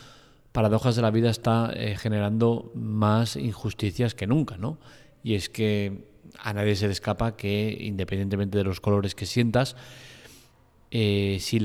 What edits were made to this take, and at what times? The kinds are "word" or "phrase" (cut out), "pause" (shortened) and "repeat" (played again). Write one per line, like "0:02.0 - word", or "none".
none